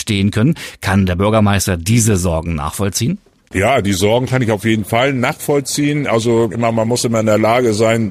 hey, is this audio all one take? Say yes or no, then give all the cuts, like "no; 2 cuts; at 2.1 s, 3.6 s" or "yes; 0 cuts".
yes; 0 cuts